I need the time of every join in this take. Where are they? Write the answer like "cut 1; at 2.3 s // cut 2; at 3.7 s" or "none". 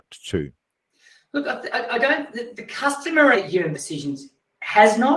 cut 1; at 2.5 s // cut 2; at 3.3 s // cut 3; at 3.7 s